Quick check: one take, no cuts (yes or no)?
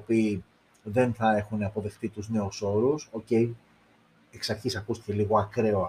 yes